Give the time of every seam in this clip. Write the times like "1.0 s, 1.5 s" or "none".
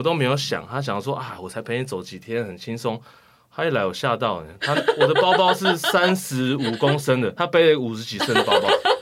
7.4 s